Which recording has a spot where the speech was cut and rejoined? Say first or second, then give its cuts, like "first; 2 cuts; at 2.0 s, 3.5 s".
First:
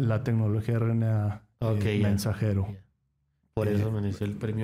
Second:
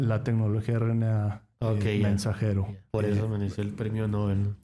second; 1 cut; at 2.9 s